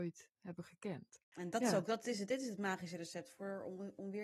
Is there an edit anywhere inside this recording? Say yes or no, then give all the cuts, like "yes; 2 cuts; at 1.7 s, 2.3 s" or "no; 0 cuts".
no; 0 cuts